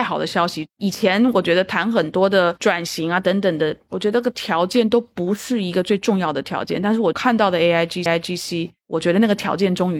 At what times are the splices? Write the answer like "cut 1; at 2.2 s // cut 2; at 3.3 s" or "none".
cut 1; at 8.1 s